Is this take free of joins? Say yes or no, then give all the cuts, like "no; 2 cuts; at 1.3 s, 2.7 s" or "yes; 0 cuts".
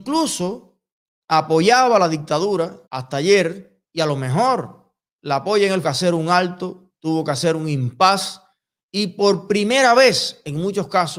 no; 2 cuts; at 2.9 s, 5.8 s